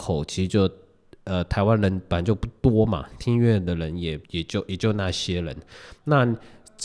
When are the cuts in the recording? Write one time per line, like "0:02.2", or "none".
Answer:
0:04.2